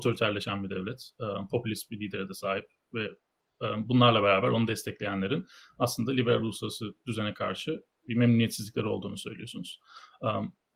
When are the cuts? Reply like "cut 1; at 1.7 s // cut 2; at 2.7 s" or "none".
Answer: none